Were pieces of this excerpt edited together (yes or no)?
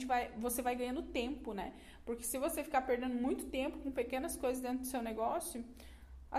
no